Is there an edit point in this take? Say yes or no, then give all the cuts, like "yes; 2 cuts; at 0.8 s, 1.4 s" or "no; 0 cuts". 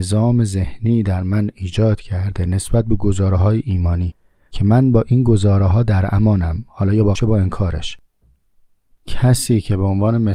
yes; 1 cut; at 7.1 s